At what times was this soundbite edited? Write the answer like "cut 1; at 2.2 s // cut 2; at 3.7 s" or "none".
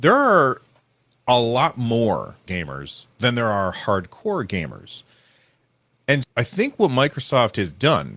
cut 1; at 2.5 s // cut 2; at 6.2 s